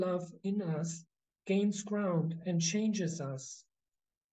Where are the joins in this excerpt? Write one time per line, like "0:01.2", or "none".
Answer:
none

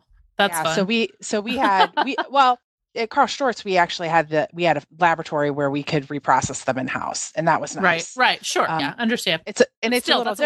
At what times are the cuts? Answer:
0:08.8

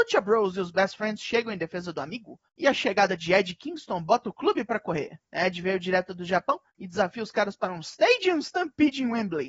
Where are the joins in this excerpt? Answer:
0:02.5
0:05.3
0:06.7

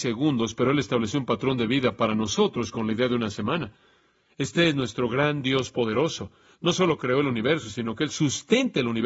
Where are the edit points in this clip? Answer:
none

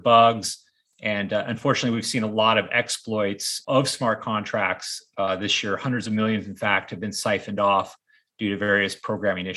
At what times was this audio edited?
none

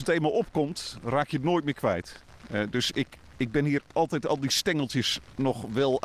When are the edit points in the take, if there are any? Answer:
none

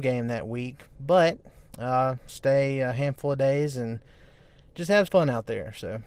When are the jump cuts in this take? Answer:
0:02.3
0:05.1

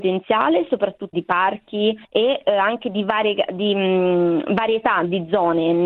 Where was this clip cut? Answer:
0:01.1
0:02.0

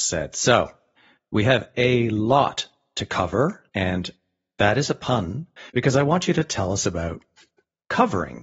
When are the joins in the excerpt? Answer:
0:03.7
0:05.7

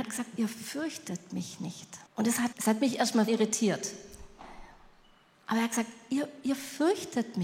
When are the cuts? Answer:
0:02.1
0:02.5
0:03.3

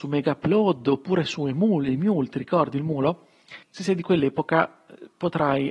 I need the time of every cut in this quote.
0:03.6

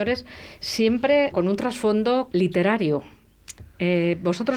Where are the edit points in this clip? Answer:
0:01.3
0:02.3

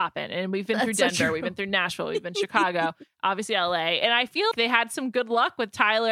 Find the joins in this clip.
0:04.5

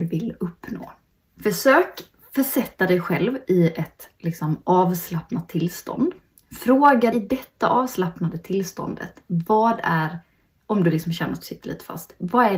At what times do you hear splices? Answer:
0:01.2
0:07.1

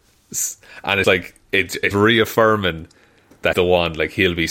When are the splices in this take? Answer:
0:01.0
0:01.9
0:03.5

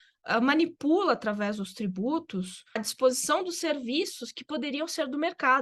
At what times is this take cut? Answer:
0:02.8

